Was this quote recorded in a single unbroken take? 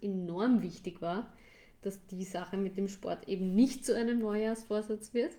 yes; 0 cuts

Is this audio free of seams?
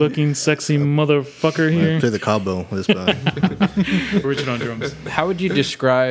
no; 1 cut; at 4.2 s

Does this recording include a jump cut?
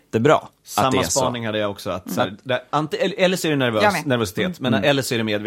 no; 0 cuts

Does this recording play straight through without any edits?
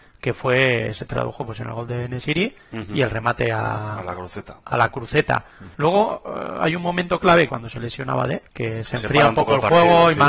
no; 3 cuts; at 5.7 s, 7.5 s, 8.5 s

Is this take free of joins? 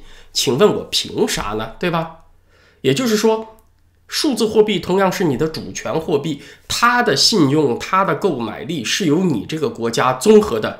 yes; 0 cuts

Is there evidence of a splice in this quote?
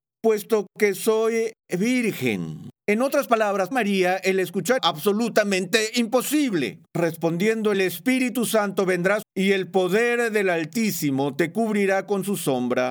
yes; 6 cuts; at 2.8 s, 3.7 s, 4.8 s, 6.9 s, 7.7 s, 9.2 s

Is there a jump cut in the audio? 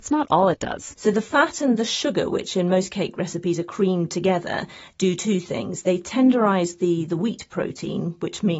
no; 0 cuts

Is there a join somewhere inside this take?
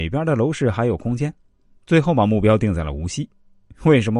no; 0 cuts

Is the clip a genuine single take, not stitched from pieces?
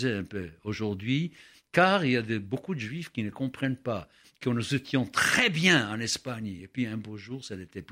yes; 0 cuts

